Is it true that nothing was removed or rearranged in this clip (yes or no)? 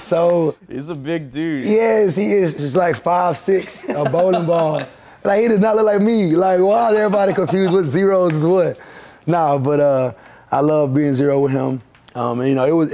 yes